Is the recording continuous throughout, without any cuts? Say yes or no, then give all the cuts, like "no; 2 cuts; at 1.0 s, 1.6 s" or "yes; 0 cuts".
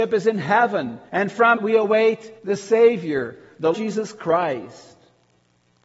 no; 4 cuts; at 1.1 s, 1.6 s, 2.4 s, 3.7 s